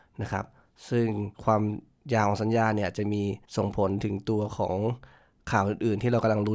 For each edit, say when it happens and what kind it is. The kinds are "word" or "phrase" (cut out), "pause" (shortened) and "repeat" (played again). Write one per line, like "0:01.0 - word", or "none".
0:01.3 - pause
0:03.4 - pause

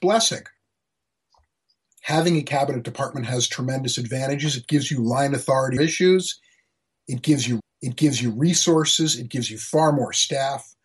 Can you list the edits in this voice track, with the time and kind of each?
0:05.8 - word
0:07.6 - repeat

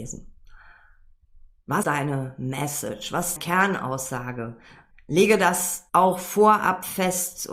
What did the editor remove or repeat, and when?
0:01.8 - word
0:03.4 - word
0:04.9 - pause
0:05.9 - pause

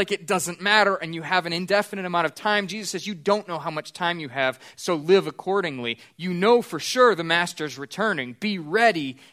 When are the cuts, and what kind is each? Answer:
none

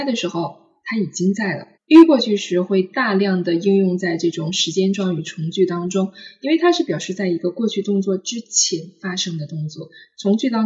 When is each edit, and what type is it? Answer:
0:01.7 - pause

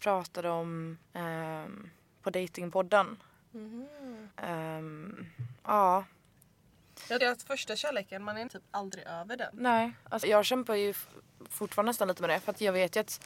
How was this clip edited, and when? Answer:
0:01.0 - pause
0:04.3 - pause
0:05.6 - pause
0:07.2 - word
0:08.5 - word
0:10.2 - word

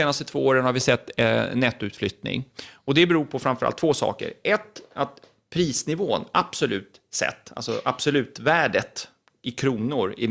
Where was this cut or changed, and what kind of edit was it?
none

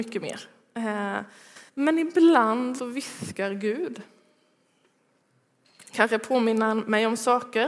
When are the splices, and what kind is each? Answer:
0:01.7 - pause
0:02.8 - word

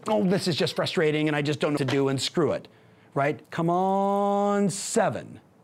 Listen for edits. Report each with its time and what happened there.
0:01.8 - word
0:03.4 - pause

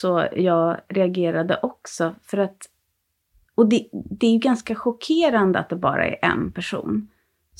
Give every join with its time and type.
none

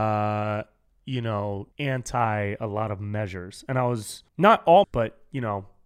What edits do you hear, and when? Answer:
0:01.7 - pause
0:04.3 - pause
0:04.8 - word

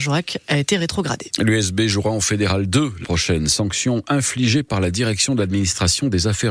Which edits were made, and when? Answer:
0:03.0 - word

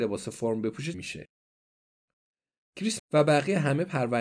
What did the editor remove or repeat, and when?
0:00.9 - word
0:03.0 - word

